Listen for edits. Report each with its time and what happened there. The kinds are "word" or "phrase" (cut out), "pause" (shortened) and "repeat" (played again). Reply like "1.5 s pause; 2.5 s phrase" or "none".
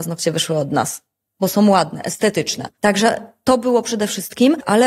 none

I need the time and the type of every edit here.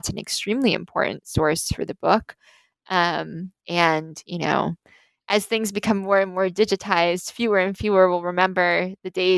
none

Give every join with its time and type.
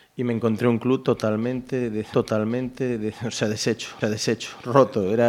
2.1 s repeat; 4.0 s repeat

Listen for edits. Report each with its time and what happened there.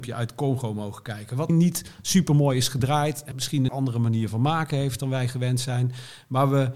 1.5 s word; 3.3 s word; 3.7 s word

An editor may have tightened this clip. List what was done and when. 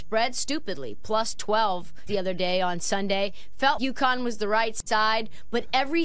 2.1 s word; 3.8 s word

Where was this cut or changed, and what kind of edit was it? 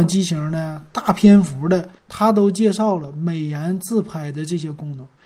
2.0 s pause

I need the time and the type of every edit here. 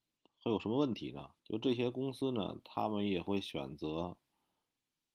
1.4 s pause

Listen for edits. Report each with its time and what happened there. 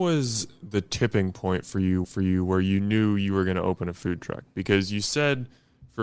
2.0 s repeat

